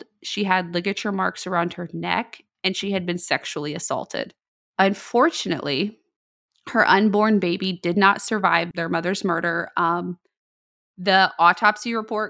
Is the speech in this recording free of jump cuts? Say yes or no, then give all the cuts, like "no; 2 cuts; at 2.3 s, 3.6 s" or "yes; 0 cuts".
yes; 0 cuts